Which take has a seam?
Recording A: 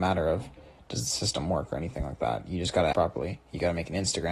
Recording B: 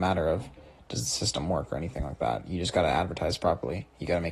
A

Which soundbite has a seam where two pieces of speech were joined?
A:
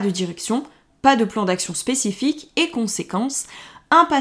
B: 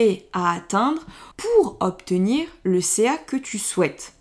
B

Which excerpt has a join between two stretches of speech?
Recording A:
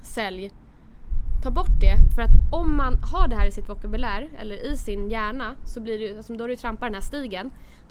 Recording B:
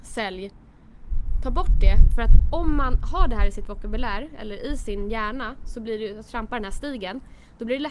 B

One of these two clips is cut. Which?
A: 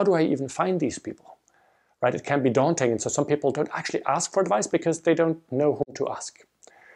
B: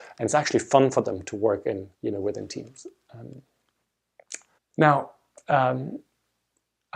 B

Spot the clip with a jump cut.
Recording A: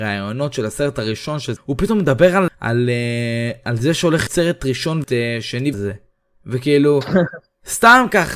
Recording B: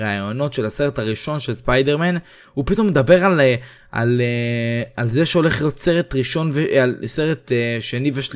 A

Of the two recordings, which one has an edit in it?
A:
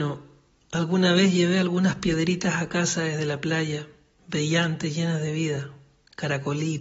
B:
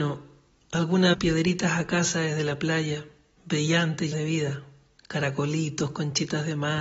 B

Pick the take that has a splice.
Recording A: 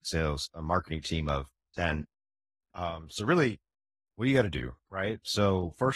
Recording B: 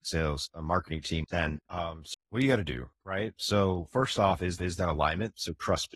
B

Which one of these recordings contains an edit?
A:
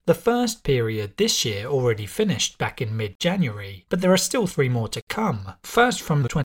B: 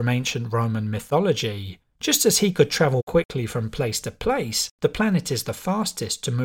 B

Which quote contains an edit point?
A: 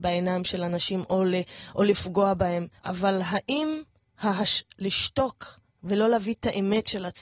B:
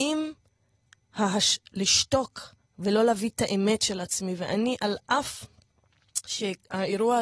A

